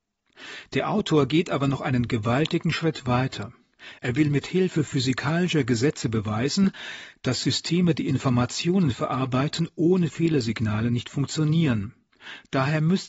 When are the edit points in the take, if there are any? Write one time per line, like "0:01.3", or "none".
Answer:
none